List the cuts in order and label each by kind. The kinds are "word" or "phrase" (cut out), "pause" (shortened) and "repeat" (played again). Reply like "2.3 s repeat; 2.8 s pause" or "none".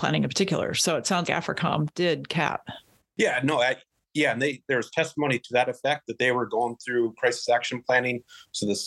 1.2 s word